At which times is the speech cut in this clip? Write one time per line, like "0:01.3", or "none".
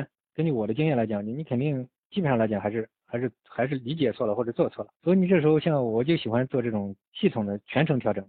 0:05.0
0:07.0